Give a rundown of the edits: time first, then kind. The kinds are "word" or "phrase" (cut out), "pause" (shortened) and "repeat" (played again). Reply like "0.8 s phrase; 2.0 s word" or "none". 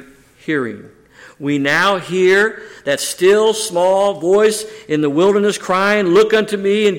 none